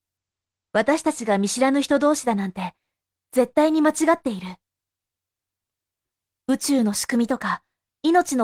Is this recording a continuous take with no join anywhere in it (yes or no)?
yes